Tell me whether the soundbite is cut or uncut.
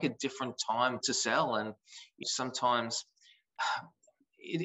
cut